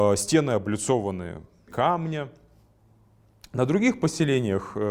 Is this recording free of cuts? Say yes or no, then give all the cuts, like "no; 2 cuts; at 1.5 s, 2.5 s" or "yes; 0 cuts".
no; 1 cut; at 1.7 s